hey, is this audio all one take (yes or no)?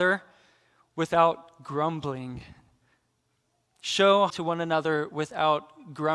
no